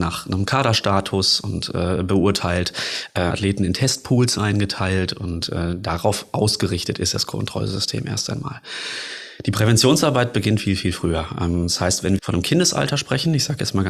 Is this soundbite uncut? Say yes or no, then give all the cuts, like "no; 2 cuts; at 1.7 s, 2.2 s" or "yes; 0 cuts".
no; 3 cuts; at 3.3 s, 10.6 s, 12.2 s